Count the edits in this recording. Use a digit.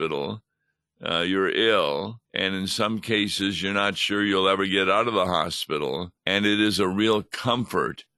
2